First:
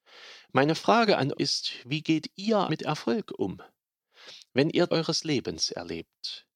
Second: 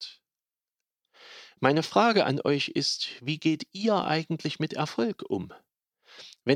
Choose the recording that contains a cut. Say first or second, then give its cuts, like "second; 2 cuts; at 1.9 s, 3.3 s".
first; 3 cuts; at 1.3 s, 2.7 s, 4.9 s